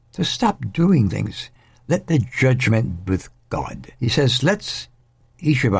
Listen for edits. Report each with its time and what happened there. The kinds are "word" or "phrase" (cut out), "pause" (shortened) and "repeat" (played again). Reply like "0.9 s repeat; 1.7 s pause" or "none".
1.1 s word; 3.1 s word; 4.0 s pause